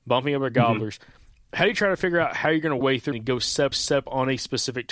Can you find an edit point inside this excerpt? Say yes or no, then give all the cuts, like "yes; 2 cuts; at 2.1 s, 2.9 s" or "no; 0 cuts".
yes; 3 cuts; at 2.8 s, 3.1 s, 3.7 s